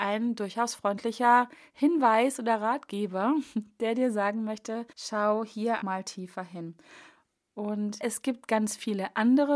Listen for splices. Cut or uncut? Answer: cut